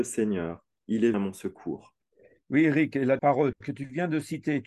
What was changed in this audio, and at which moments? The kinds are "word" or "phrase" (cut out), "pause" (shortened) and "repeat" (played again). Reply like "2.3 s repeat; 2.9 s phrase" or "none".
1.1 s word; 2.1 s pause; 3.2 s word